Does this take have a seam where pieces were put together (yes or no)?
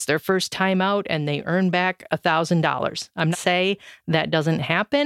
yes